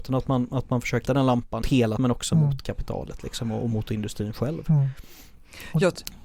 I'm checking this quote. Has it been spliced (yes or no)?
yes